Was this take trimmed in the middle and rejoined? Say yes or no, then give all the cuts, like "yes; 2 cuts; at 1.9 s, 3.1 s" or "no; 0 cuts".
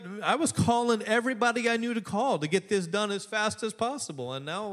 no; 0 cuts